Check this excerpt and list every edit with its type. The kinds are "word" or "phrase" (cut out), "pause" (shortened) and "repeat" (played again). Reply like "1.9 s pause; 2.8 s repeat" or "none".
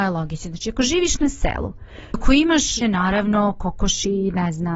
2.1 s word; 2.8 s word